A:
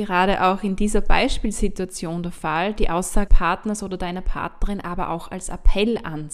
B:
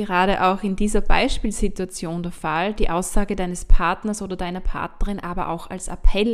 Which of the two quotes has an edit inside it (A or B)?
A